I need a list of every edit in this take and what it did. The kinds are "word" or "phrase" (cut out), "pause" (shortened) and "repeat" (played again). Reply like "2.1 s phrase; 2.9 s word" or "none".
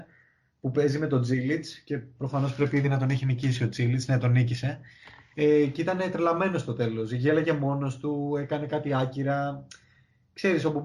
none